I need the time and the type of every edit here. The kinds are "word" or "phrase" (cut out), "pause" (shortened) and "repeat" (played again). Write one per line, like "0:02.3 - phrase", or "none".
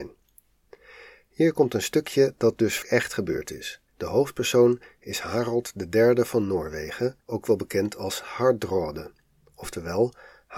0:02.8 - word
0:03.9 - pause
0:07.2 - pause
0:08.2 - word